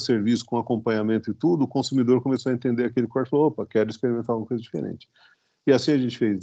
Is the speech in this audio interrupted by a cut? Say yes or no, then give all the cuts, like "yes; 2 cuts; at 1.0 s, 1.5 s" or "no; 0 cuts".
no; 0 cuts